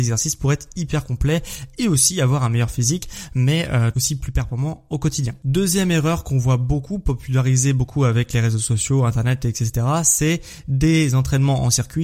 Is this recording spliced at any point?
yes; 1 cut; at 3.9 s

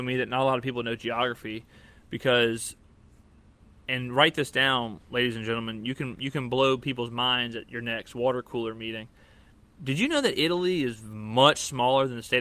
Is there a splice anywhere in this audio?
no; 0 cuts

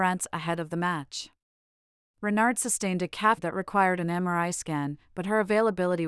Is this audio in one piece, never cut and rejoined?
no; 1 cut; at 3.4 s

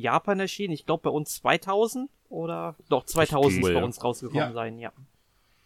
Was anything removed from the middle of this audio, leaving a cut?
yes; 2 cuts; at 2.2 s, 3.6 s

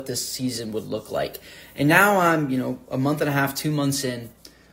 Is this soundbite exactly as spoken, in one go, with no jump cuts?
yes; 0 cuts

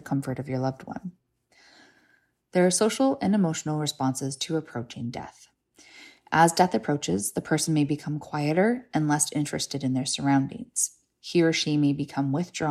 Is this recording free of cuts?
yes; 0 cuts

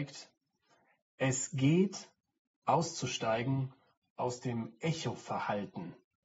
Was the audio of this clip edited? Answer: no; 0 cuts

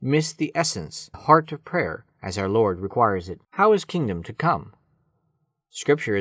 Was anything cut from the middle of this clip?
yes; 4 cuts; at 1.1 s, 2.1 s, 3.4 s, 3.9 s

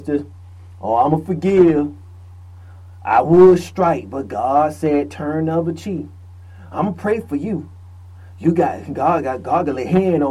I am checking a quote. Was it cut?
no; 0 cuts

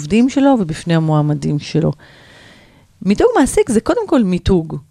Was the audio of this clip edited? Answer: no; 0 cuts

